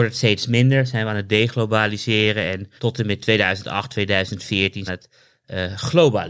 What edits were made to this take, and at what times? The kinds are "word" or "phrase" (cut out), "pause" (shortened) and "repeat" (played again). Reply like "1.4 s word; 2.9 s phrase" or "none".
2.8 s pause; 4.9 s phrase